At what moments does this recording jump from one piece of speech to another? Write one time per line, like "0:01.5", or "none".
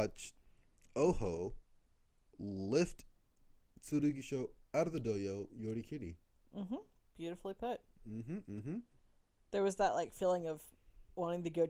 none